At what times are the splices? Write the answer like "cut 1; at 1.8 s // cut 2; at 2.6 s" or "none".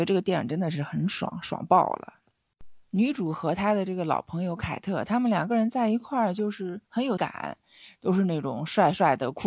cut 1; at 2.9 s // cut 2; at 6.9 s // cut 3; at 7.2 s